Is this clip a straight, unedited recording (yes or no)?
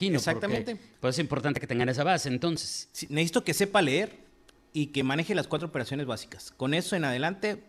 yes